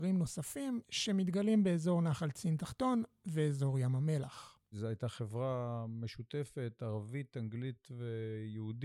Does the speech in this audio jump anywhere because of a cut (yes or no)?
yes